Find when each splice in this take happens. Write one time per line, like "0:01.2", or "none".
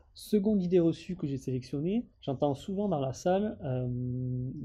0:02.1